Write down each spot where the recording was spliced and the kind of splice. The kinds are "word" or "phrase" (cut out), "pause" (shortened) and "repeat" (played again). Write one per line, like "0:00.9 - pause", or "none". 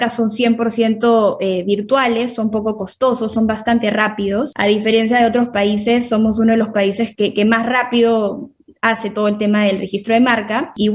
0:07.2 - word